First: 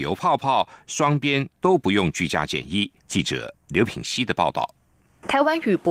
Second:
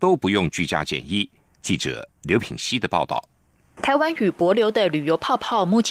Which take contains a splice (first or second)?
first